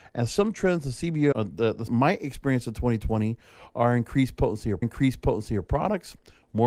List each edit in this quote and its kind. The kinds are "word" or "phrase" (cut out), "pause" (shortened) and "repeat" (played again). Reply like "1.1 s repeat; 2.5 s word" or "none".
1.3 s word; 1.9 s phrase; 4.8 s repeat